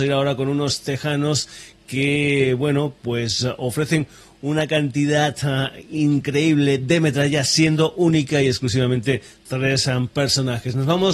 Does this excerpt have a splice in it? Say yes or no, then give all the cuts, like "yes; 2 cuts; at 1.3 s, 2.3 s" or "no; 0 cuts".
no; 0 cuts